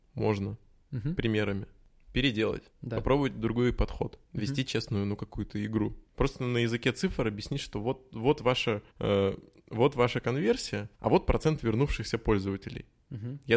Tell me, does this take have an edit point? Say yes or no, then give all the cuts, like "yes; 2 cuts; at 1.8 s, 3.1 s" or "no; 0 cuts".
yes; 5 cuts; at 2.7 s, 4.2 s, 6.1 s, 8.9 s, 10.9 s